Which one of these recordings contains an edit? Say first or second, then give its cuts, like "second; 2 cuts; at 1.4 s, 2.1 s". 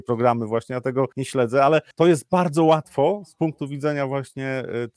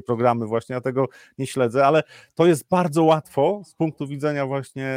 first; 2 cuts; at 1.1 s, 1.9 s